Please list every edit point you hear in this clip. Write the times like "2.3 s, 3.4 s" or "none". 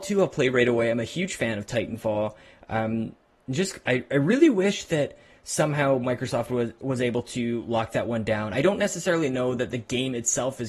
none